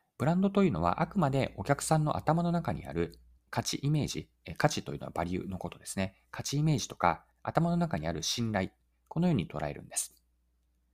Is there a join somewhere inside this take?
yes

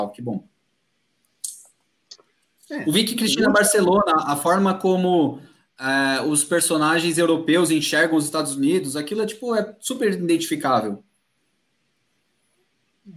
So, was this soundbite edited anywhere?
no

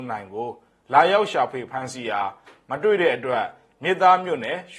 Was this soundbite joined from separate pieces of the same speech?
no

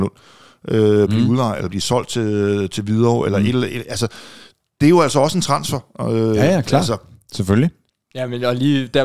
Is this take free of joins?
yes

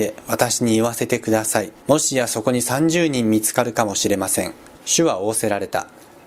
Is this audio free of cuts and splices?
no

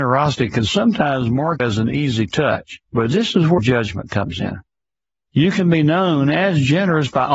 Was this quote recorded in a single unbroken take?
no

